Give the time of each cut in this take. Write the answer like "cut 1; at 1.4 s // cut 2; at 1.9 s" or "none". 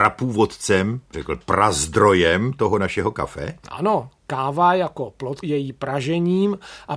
cut 1; at 1.1 s // cut 2; at 5.4 s